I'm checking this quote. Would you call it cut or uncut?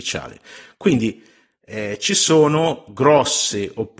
uncut